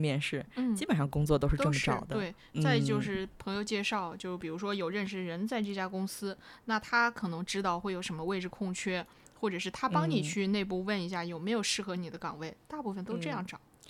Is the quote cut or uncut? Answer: uncut